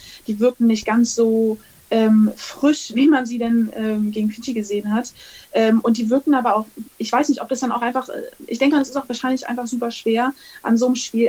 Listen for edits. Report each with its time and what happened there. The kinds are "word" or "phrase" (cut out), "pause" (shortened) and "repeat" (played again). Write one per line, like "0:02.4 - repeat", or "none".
none